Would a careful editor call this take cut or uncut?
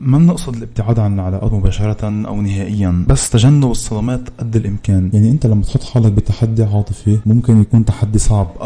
uncut